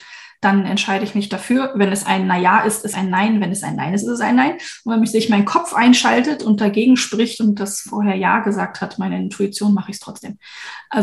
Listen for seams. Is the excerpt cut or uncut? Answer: cut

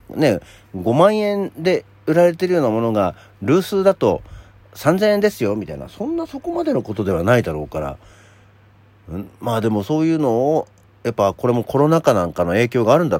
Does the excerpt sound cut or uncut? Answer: uncut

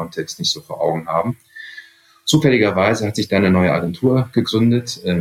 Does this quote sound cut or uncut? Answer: uncut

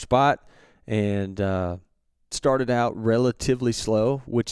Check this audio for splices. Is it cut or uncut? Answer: cut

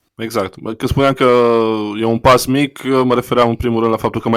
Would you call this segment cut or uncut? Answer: uncut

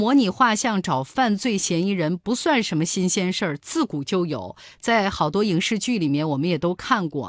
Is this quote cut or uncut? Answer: uncut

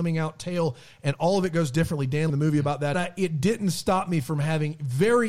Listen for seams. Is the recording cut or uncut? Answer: cut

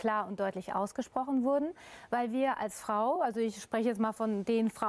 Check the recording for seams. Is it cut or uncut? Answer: uncut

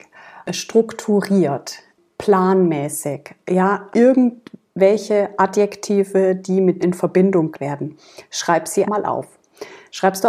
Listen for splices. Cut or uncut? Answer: cut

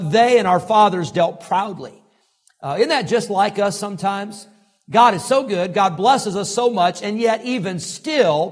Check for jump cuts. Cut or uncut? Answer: uncut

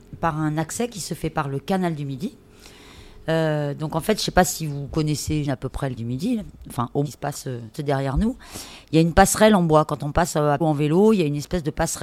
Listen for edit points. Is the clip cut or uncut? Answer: cut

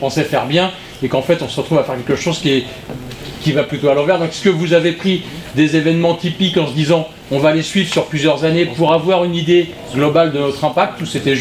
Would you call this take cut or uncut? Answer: uncut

